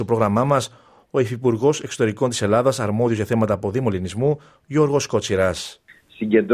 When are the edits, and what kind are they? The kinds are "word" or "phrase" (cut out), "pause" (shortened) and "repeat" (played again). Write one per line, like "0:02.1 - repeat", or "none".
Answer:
none